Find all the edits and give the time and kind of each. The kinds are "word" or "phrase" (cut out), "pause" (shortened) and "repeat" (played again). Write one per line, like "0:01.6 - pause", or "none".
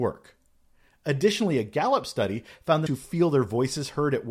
0:02.9 - word